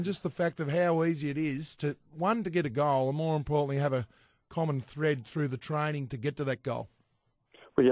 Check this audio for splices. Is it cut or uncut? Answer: uncut